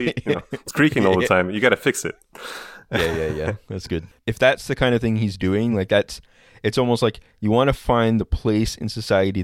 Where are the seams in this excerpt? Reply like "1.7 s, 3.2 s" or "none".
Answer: none